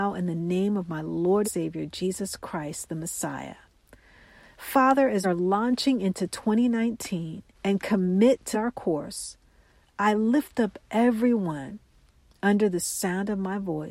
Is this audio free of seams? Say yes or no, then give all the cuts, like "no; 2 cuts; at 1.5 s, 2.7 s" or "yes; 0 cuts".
no; 4 cuts; at 1.4 s, 5.2 s, 7.5 s, 8.5 s